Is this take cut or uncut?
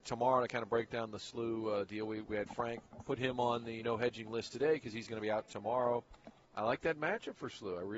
cut